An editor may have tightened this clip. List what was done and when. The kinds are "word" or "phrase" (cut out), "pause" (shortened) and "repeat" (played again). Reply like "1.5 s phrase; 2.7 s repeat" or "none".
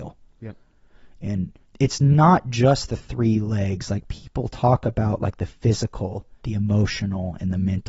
1.6 s pause; 6.4 s pause